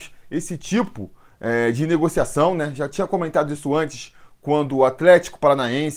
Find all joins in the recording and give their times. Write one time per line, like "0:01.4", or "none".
none